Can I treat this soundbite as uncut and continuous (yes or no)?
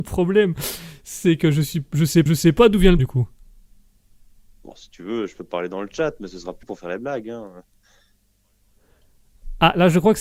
no